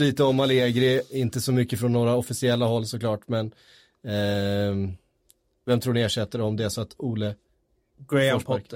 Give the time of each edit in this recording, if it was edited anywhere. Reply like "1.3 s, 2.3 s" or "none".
none